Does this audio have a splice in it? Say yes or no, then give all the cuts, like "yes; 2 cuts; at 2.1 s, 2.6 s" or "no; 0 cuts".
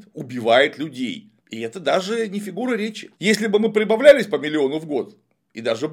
yes; 2 cuts; at 1.4 s, 3.1 s